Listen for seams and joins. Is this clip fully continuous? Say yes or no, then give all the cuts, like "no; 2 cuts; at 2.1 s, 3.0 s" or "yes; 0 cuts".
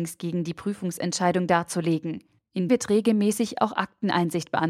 no; 1 cut; at 2.7 s